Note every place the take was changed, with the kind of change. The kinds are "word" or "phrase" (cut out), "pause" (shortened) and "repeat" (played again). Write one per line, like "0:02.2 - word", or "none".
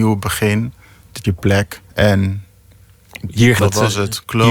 0:01.2 - word
0:01.9 - pause
0:03.6 - word